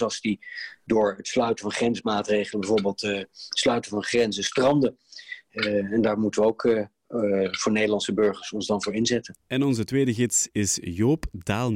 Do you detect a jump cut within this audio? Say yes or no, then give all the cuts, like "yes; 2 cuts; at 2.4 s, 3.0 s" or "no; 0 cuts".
no; 0 cuts